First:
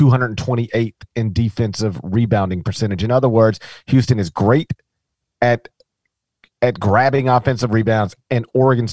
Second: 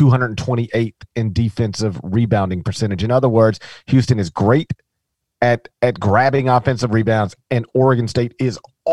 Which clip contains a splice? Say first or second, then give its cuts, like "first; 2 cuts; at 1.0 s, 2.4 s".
second; 1 cut; at 5.7 s